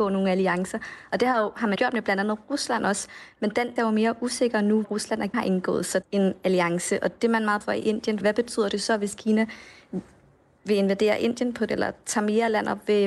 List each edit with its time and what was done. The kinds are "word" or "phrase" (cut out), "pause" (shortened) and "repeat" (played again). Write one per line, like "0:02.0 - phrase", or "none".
0:01.8 - word
0:03.8 - word
0:04.8 - word
0:05.3 - word
0:06.0 - word
0:07.6 - word
0:08.2 - word
0:11.7 - word